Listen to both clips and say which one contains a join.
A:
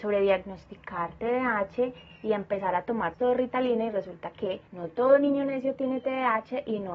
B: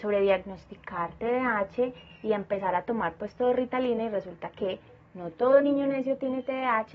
A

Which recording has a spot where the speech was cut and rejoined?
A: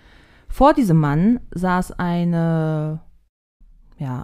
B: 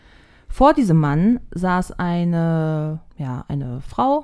B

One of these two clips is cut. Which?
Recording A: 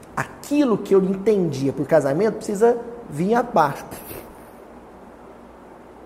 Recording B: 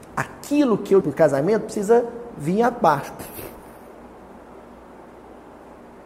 B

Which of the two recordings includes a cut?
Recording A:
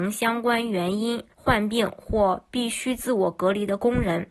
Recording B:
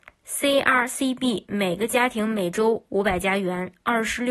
A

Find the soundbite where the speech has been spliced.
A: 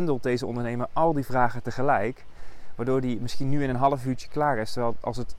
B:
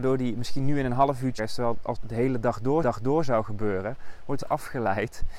B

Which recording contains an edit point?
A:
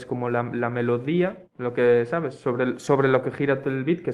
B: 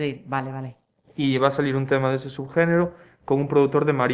A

